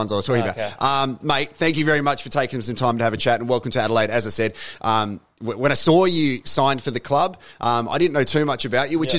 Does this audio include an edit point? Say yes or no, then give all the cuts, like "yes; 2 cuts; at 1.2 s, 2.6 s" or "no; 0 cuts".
no; 0 cuts